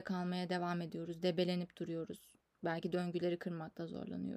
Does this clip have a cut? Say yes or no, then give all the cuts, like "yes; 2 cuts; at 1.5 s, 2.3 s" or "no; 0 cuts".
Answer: no; 0 cuts